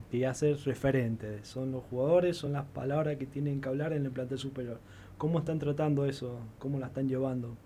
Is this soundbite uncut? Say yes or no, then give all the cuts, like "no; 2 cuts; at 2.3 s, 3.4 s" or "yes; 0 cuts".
yes; 0 cuts